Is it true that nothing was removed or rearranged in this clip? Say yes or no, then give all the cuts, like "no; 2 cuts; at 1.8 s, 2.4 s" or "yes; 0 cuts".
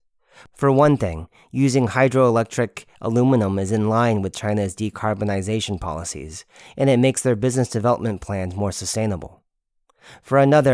yes; 0 cuts